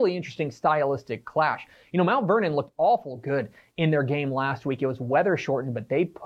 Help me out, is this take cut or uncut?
uncut